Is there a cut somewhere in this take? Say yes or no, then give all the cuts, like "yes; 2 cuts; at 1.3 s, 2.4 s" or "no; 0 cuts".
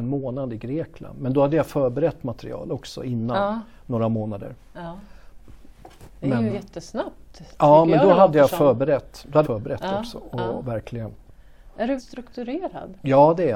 yes; 3 cuts; at 6.5 s, 9.4 s, 12.0 s